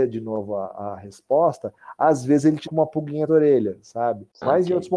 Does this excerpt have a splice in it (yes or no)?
yes